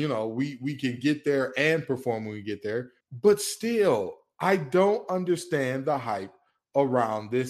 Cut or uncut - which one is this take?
cut